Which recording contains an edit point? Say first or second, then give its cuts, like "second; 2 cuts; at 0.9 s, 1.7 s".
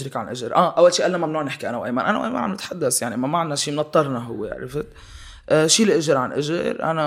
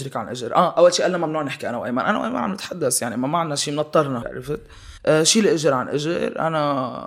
second; 2 cuts; at 4.2 s, 5.0 s